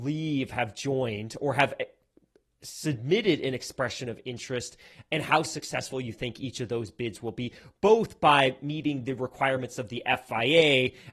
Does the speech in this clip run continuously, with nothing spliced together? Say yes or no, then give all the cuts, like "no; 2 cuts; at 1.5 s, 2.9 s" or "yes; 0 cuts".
yes; 0 cuts